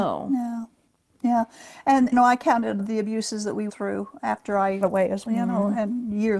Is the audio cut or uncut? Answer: cut